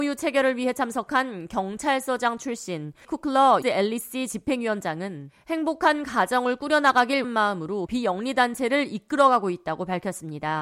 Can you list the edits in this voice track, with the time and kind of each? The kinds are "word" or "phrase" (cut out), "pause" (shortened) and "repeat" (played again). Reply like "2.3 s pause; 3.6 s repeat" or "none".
3.0 s word; 3.6 s word; 7.2 s word; 7.9 s word